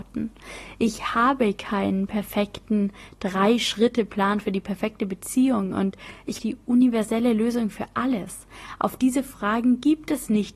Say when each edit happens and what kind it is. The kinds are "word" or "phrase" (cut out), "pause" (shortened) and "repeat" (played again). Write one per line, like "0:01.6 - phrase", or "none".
0:06.4 - phrase